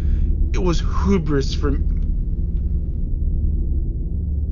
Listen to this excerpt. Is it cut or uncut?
uncut